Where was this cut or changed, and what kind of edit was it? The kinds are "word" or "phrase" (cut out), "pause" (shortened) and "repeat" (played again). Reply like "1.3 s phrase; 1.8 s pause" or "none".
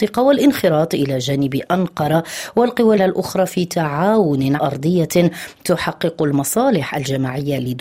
3.0 s word; 4.6 s word

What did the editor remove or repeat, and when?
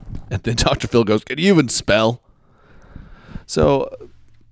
none

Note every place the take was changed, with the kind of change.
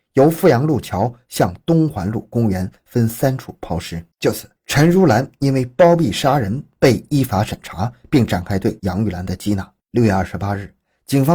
4.1 s pause; 4.6 s pause; 9.8 s pause

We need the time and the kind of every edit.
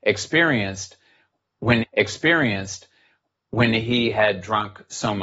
1.8 s repeat

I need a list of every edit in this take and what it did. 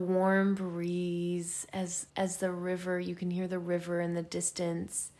2.1 s pause

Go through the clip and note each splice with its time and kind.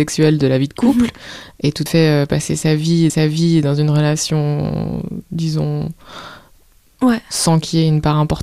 1.9 s word; 3.1 s repeat; 6.9 s word

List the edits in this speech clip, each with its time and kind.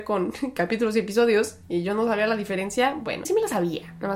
3.2 s word

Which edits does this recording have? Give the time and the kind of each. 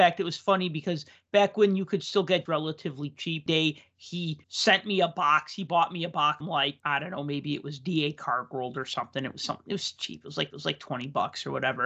2.5 s phrase; 3.5 s phrase; 4.4 s pause; 6.4 s word; 10.5 s repeat

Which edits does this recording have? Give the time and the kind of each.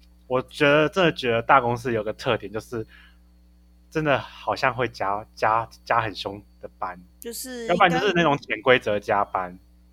7.1 s pause

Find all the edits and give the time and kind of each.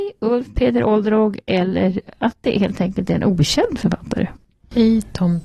none

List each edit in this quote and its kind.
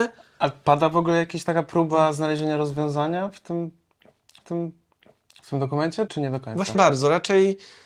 4.4 s repeat; 6.1 s word; 6.7 s word

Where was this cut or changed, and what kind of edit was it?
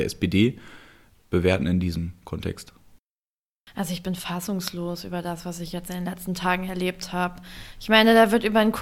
1.3 s word

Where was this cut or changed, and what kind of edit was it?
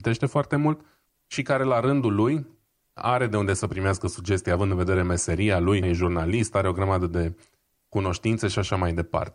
5.8 s word

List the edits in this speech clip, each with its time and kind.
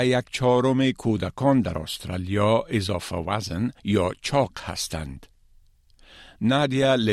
3.8 s pause

